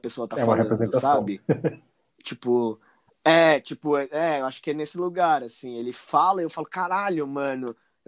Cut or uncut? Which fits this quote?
cut